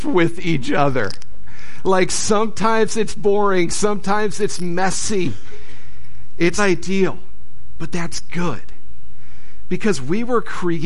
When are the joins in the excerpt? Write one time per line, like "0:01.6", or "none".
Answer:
0:06.6